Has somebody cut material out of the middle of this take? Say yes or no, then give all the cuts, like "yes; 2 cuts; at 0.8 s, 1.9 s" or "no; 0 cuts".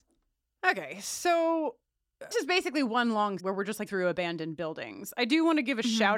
yes; 3 cuts; at 2.3 s, 3.4 s, 3.9 s